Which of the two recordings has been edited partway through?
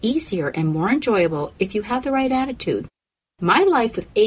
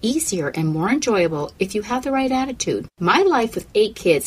second; 1 cut; at 2.9 s

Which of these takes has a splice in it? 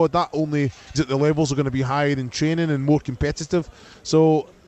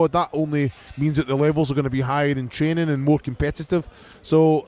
first; 1 cut; at 0.9 s

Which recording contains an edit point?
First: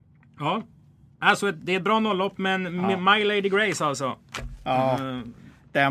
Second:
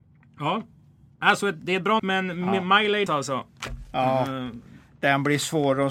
second; 2 cuts; at 2.0 s, 3.1 s

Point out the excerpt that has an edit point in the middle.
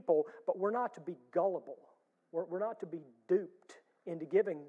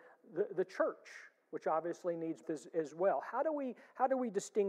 second; 1 cut; at 2.4 s

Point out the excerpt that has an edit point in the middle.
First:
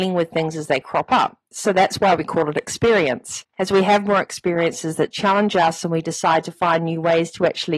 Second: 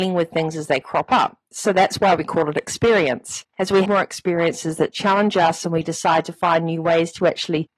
second; 1 cut; at 3.8 s

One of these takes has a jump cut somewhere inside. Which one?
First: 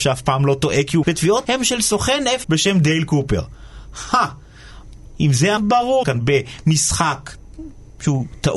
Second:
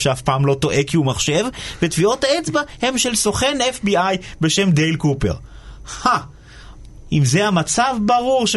first; 5 cuts; at 1.0 s, 1.4 s, 2.4 s, 5.6 s, 6.0 s

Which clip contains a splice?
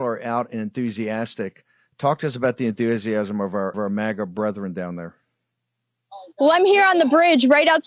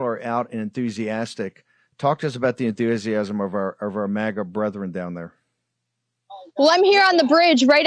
first; 1 cut; at 3.7 s

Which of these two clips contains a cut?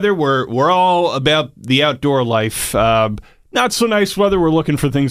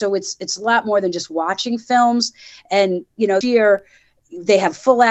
second; 1 cut; at 3.4 s

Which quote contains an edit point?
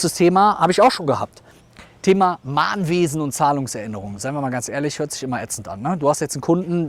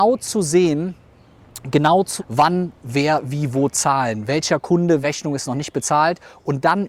second; 3 cuts; at 2.2 s, 2.8 s, 5.0 s

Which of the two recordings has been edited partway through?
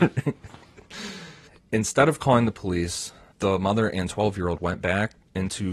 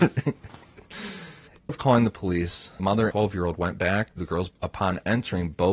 second; 5 cuts; at 1.7 s, 2.8 s, 3.1 s, 4.2 s, 4.5 s

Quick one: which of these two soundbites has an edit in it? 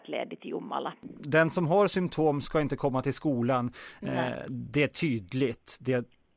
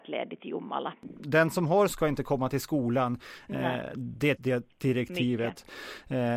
second; 3 cuts; at 1.9 s, 4.4 s, 4.7 s

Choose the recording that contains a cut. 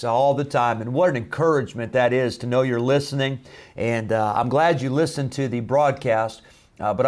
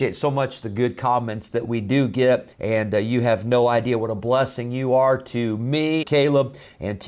second; 2 cuts; at 2.5 s, 6.0 s

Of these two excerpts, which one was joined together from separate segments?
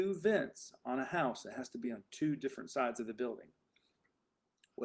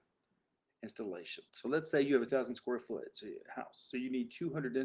second; 2 cuts; at 1.5 s, 2.3 s

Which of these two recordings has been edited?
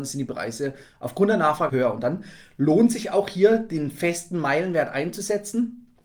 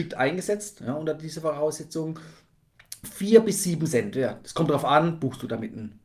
first; 1 cut; at 1.7 s

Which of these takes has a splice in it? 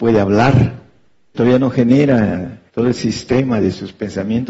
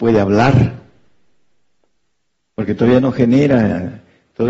first; 2 cuts; at 1.3 s, 2.7 s

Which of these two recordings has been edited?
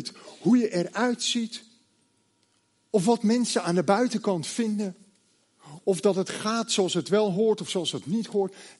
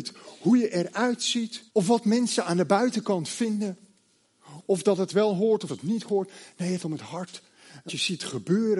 second; 5 cuts; at 1.7 s, 5.1 s, 5.7 s, 6.8 s, 7.9 s

